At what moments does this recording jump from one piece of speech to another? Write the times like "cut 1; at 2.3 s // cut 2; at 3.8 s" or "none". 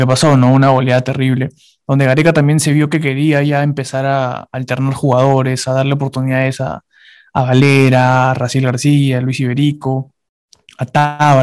none